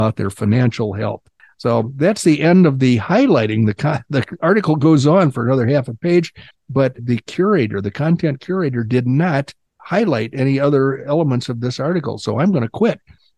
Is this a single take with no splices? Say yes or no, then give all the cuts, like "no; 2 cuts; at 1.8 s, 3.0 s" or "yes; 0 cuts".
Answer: no; 1 cut; at 7.0 s